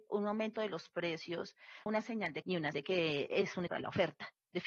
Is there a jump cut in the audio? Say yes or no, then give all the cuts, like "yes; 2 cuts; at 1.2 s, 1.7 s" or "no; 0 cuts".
yes; 4 cuts; at 1.9 s, 2.4 s, 2.7 s, 3.7 s